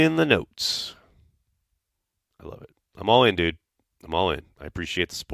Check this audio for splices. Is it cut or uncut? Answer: uncut